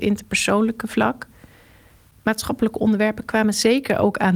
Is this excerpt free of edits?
yes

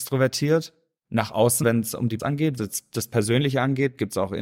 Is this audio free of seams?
no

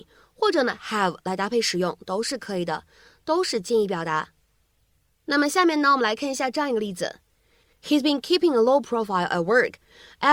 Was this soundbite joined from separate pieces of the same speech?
no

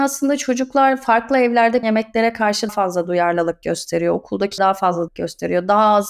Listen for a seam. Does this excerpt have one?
yes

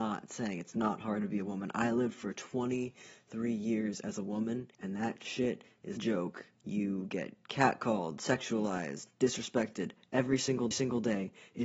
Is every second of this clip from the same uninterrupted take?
no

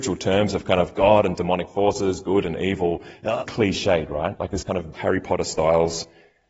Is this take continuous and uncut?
no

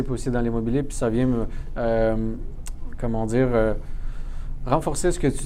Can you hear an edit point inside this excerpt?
no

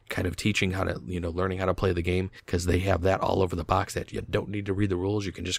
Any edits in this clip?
no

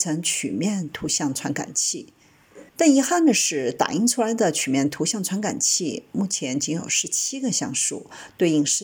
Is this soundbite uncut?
no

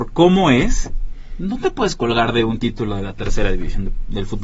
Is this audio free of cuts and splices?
yes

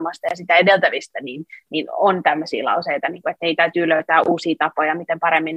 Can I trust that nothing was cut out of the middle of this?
yes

